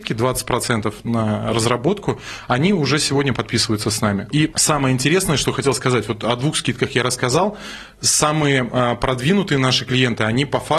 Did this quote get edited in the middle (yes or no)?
no